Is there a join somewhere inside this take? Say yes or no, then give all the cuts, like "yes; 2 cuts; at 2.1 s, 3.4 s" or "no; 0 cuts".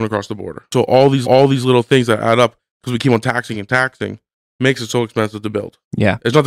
yes; 2 cuts; at 1.2 s, 3.5 s